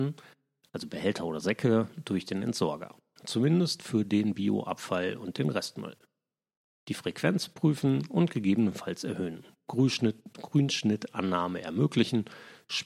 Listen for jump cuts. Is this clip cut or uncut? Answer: uncut